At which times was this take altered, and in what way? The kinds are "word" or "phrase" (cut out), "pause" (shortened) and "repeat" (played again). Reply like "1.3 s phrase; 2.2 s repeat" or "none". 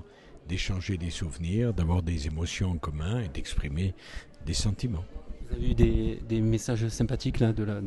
none